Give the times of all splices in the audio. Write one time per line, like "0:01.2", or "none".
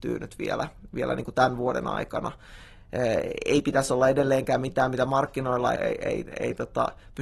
0:05.7